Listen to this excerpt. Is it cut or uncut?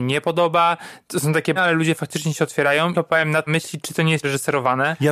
cut